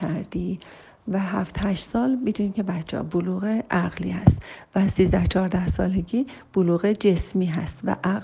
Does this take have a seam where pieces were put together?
no; 0 cuts

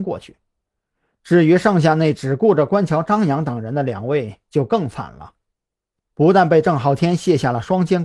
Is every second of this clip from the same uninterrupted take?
yes; 0 cuts

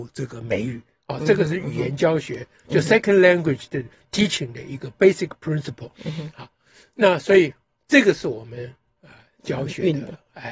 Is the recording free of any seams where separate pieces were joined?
yes; 0 cuts

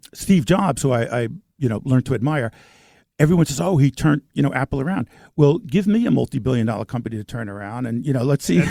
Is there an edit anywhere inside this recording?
no; 0 cuts

